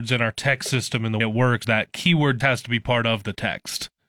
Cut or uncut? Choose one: cut